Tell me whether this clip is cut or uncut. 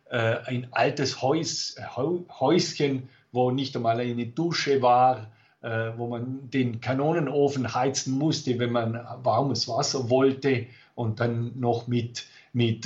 uncut